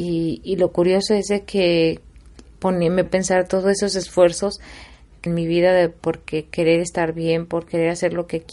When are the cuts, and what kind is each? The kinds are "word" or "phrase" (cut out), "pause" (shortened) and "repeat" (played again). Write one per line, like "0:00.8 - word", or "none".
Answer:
0:02.5 - word
0:03.1 - word
0:05.3 - phrase